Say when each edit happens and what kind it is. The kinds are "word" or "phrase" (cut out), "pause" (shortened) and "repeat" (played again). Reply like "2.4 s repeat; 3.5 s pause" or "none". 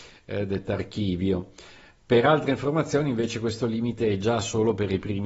none